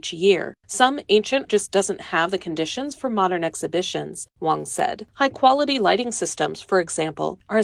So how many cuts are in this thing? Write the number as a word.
one